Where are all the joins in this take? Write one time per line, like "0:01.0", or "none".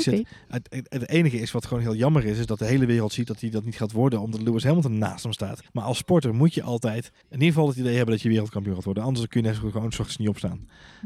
0:05.7
0:07.2